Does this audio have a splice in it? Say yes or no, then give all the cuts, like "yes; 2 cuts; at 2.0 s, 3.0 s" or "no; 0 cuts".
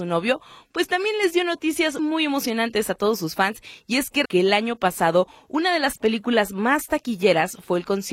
yes; 2 cuts; at 2.0 s, 4.2 s